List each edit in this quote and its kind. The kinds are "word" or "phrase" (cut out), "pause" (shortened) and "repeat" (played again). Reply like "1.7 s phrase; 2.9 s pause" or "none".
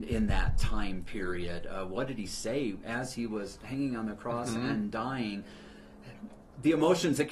2.8 s word; 6.4 s word